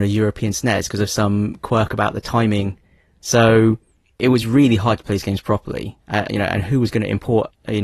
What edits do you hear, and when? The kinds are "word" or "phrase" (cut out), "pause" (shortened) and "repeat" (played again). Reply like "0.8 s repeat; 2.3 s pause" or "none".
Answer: none